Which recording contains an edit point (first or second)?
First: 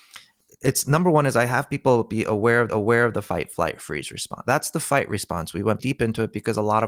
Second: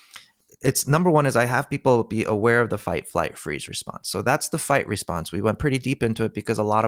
first